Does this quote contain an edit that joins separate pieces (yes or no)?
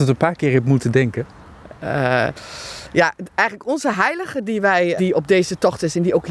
yes